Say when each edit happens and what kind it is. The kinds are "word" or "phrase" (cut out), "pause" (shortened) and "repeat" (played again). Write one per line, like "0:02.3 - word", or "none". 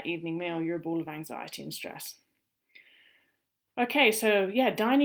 none